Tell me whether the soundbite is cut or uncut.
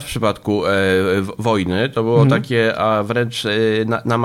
uncut